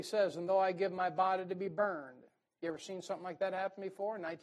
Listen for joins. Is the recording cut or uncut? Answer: uncut